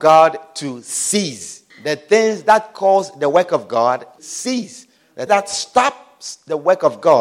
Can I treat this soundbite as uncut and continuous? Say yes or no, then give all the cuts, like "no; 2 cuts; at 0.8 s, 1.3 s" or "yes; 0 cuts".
no; 3 cuts; at 1.7 s, 4.2 s, 5.3 s